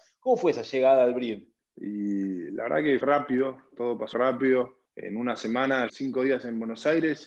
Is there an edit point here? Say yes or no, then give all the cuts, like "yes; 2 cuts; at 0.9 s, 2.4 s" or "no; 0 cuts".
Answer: yes; 5 cuts; at 1.6 s, 3.0 s, 4.1 s, 4.8 s, 5.9 s